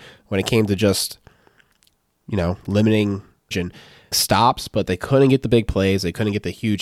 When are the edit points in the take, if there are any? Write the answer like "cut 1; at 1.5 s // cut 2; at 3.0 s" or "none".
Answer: cut 1; at 3.5 s // cut 2; at 4.1 s